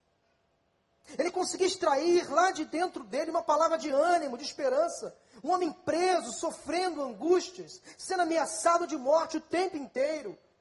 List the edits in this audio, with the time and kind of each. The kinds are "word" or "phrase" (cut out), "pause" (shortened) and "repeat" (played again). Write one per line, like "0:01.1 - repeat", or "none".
none